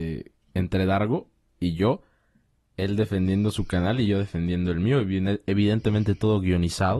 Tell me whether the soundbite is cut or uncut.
uncut